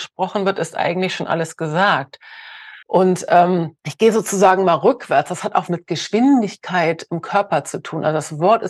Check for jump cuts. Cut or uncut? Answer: cut